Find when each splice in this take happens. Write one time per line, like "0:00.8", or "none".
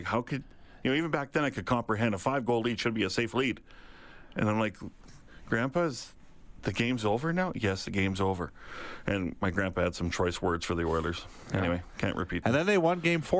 none